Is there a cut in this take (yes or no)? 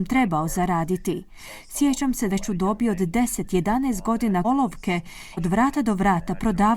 yes